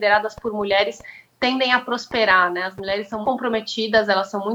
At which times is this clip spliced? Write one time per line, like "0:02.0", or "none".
0:03.2